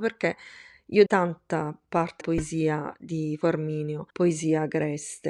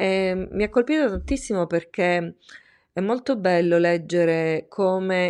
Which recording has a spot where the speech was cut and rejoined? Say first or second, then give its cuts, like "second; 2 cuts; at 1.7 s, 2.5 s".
first; 4 cuts; at 1.1 s, 2.2 s, 3.4 s, 4.1 s